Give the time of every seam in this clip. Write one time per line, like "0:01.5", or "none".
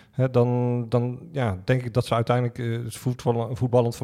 none